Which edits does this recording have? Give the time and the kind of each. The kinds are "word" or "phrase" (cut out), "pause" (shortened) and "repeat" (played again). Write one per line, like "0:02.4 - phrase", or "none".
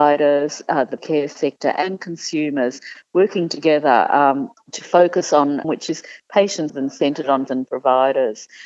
0:01.0 - word
0:04.6 - pause
0:05.6 - phrase
0:06.7 - phrase
0:07.5 - word